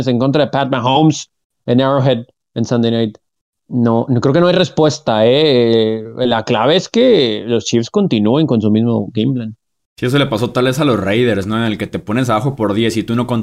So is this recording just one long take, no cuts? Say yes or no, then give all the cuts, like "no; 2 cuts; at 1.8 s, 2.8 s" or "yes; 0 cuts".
yes; 0 cuts